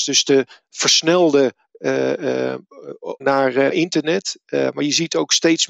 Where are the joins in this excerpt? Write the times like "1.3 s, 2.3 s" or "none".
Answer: 3.2 s, 3.7 s